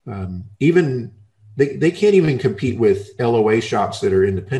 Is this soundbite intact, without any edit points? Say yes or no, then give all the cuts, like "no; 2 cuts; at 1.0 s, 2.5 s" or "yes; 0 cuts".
yes; 0 cuts